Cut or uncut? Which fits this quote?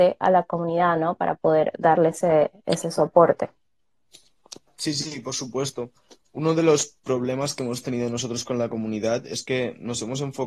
uncut